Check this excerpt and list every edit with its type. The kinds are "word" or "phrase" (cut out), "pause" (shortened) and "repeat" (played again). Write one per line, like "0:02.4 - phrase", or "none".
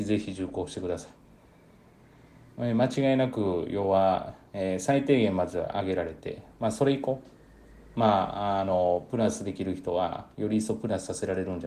none